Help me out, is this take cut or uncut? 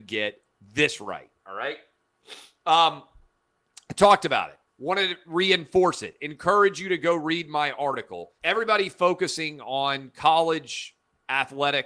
cut